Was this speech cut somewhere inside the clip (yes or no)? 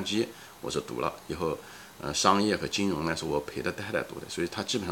no